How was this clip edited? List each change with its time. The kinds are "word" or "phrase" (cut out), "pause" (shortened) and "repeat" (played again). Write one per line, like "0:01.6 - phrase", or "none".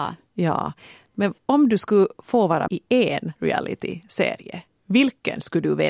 0:01.4 - pause
0:02.7 - word
0:03.3 - pause